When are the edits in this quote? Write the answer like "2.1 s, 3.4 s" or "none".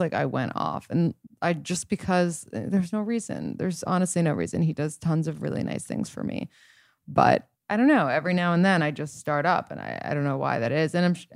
1.3 s, 7.6 s